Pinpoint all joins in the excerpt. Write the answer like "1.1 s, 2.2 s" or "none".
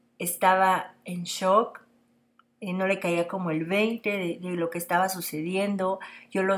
none